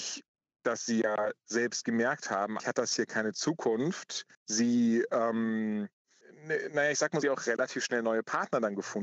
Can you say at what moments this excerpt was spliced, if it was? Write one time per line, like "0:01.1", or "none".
0:02.6
0:04.3
0:07.2